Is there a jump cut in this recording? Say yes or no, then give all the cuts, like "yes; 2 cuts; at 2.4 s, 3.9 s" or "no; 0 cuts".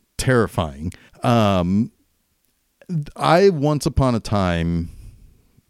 yes; 1 cut; at 1.1 s